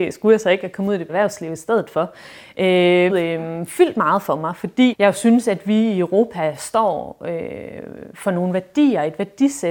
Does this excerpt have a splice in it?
yes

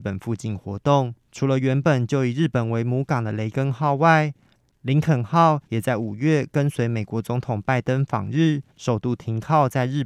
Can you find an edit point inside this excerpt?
yes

